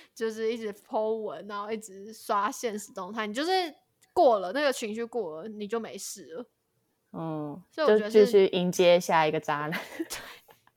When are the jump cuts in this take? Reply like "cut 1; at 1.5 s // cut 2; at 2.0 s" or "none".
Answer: none